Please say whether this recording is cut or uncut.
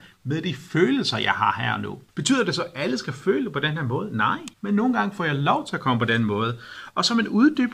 cut